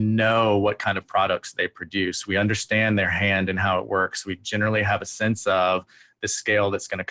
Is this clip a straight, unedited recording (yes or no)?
yes